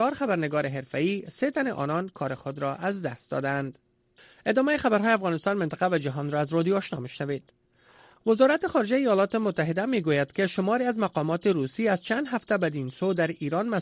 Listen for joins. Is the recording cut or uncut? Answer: uncut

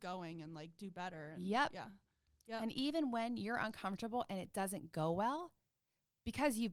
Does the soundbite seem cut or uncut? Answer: uncut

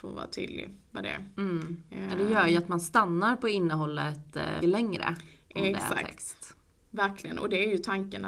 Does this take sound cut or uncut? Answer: cut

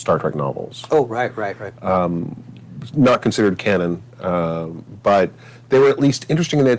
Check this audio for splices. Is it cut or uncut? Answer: cut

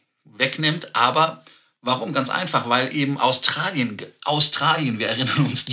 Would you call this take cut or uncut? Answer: uncut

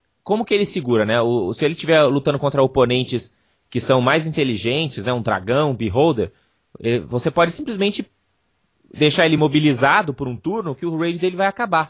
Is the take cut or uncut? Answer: uncut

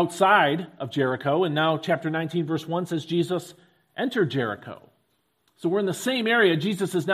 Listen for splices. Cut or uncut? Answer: uncut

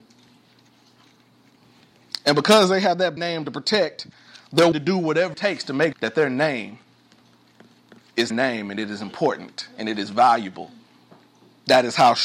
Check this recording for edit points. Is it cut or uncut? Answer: cut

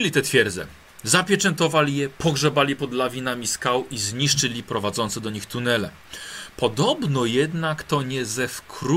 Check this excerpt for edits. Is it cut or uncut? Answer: uncut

